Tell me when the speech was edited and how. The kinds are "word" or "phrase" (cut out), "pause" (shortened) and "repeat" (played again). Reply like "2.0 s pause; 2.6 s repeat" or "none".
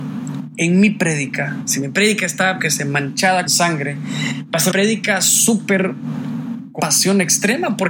2.6 s word; 3.5 s word; 4.7 s word; 6.8 s word